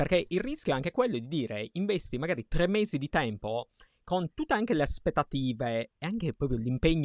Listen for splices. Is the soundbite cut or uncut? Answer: uncut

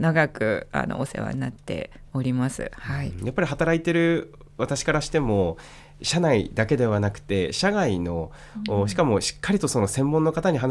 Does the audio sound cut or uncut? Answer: uncut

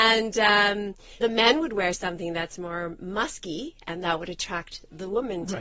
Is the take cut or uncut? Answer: cut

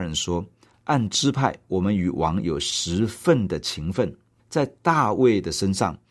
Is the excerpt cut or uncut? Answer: cut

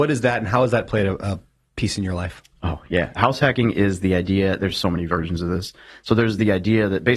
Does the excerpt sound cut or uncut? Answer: uncut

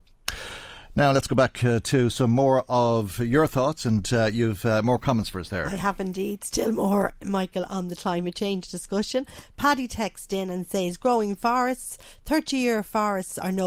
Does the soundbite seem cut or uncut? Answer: uncut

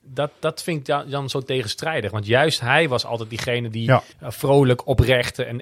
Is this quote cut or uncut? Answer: cut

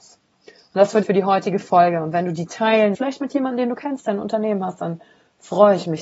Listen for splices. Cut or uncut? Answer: cut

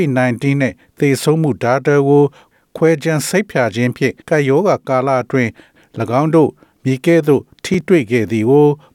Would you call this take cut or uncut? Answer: cut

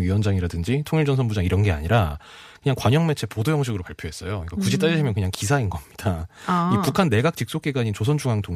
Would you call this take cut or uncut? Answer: uncut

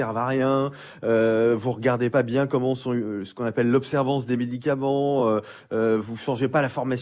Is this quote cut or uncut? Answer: uncut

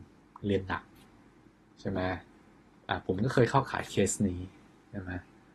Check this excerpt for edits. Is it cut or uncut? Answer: uncut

